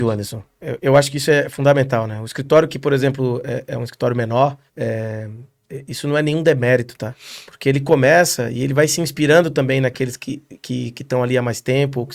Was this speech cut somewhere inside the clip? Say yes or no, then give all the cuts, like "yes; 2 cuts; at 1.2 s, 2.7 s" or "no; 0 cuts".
yes; 1 cut; at 4.7 s